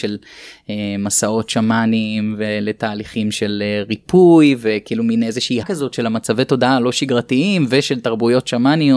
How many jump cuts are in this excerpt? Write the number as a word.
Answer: one